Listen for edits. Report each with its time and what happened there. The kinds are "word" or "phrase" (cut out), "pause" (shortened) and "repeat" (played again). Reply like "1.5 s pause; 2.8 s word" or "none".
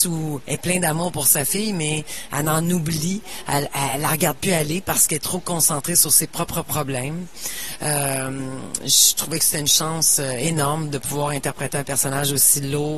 none